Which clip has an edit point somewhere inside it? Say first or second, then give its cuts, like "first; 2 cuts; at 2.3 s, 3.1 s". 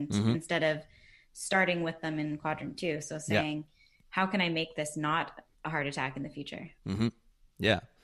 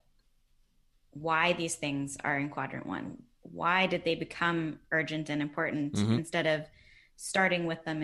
first; 1 cut; at 5.5 s